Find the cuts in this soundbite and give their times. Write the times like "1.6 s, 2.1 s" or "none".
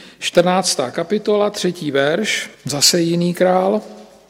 2.5 s